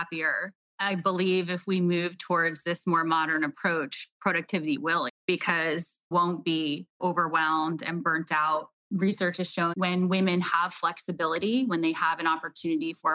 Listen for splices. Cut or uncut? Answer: cut